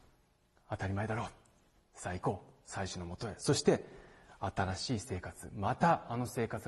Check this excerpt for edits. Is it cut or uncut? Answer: uncut